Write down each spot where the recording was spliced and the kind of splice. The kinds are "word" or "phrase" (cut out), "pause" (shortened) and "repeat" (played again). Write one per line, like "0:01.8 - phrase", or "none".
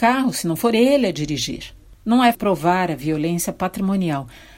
0:02.3 - word